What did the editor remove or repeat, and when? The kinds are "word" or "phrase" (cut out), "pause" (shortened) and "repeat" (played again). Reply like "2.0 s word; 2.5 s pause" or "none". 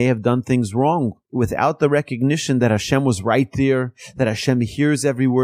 1.2 s pause